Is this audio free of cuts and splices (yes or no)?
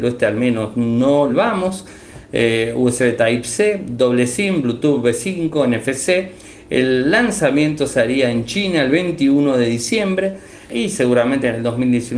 no